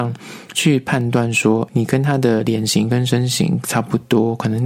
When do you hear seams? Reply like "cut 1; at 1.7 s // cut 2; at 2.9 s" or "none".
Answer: cut 1; at 1.7 s